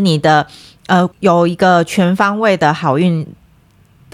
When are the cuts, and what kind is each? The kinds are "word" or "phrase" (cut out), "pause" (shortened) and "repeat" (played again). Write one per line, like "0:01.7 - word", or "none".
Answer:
0:01.1 - pause

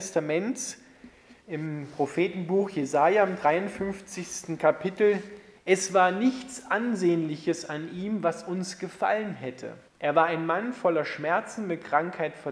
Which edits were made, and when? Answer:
0:01.4 - pause
0:05.6 - pause
0:09.9 - pause

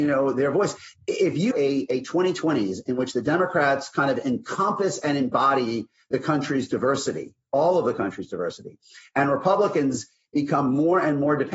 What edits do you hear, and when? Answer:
0:01.5 - word

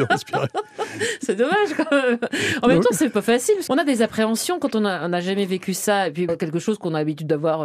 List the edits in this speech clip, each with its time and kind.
0:03.7 - word
0:06.3 - phrase

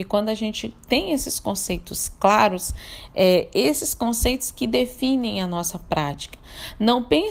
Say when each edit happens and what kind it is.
none

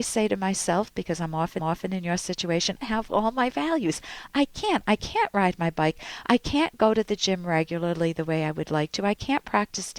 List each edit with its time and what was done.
0:01.6 - repeat
0:02.8 - phrase

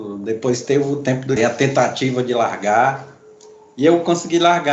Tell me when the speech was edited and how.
0:01.4 - word

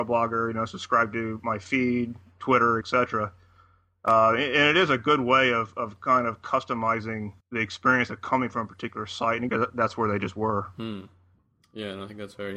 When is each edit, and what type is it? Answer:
0:02.8 - word
0:07.4 - pause
0:09.5 - phrase

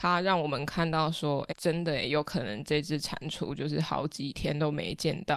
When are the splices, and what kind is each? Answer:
0:01.5 - word

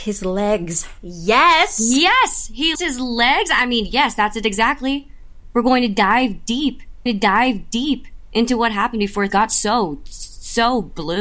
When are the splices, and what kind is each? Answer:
0:02.7 - word
0:07.1 - repeat
0:09.3 - word

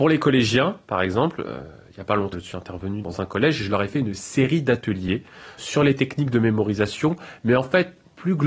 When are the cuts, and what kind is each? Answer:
0:02.3 - word
0:03.0 - word
0:05.6 - word

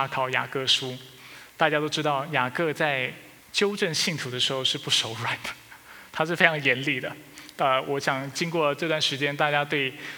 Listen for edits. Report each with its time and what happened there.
0:03.4 - pause

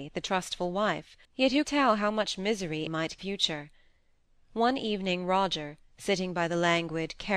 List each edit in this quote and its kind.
0:01.2 - pause
0:01.6 - word
0:02.9 - phrase
0:03.2 - phrase

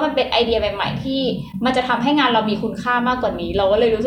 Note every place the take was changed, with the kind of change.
none

